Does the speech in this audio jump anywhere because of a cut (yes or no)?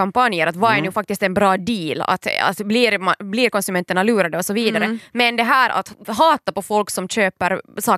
no